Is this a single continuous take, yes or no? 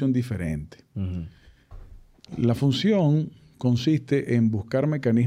yes